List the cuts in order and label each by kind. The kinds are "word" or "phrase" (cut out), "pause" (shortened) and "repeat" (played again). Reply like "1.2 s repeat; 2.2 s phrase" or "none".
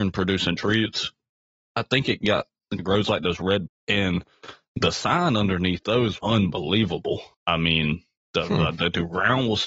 2.8 s word; 3.7 s word; 6.2 s word; 7.3 s pause